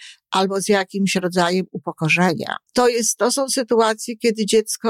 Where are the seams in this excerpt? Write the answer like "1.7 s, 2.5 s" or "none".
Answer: 2.7 s